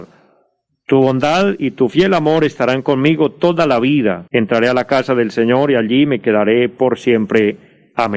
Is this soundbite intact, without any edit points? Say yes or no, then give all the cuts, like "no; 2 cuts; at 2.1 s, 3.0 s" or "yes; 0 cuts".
no; 1 cut; at 4.3 s